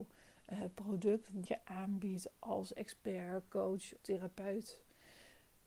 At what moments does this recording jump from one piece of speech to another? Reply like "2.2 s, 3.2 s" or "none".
1.5 s, 4.0 s